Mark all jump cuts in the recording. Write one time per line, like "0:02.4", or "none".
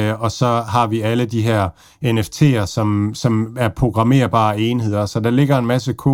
none